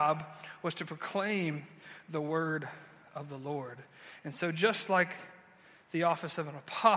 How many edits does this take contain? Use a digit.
0